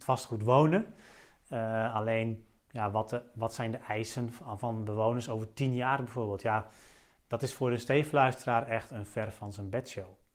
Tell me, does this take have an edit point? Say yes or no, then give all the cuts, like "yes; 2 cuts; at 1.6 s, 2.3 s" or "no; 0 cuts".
no; 0 cuts